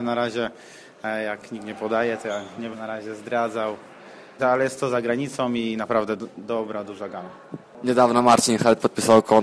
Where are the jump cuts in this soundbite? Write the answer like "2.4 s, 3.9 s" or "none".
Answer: 2.7 s, 4.4 s